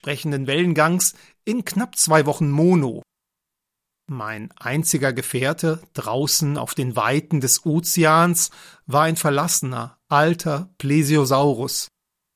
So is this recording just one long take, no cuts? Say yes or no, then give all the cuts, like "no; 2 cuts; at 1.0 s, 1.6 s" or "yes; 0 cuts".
yes; 0 cuts